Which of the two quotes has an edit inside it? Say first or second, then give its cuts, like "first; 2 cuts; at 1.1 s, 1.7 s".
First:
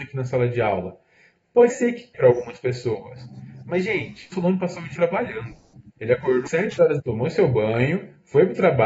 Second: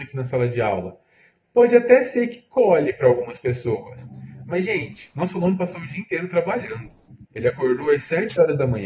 first; 6 cuts; at 1.7 s, 2.1 s, 4.3 s, 5.0 s, 6.5 s, 7.0 s